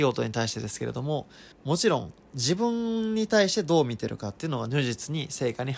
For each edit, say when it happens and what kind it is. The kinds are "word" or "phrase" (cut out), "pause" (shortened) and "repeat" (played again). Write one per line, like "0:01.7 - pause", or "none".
0:01.5 - pause